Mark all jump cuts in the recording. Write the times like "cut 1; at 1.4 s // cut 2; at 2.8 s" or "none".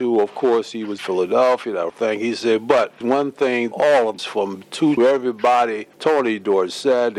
cut 1; at 1.0 s // cut 2; at 1.9 s // cut 3; at 3.0 s // cut 4; at 3.7 s // cut 5; at 4.2 s // cut 6; at 5.0 s // cut 7; at 5.9 s